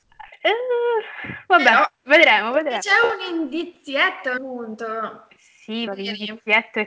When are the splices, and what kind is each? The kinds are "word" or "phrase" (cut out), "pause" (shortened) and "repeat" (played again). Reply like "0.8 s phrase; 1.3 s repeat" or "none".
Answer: 1.9 s pause; 4.4 s phrase; 5.9 s word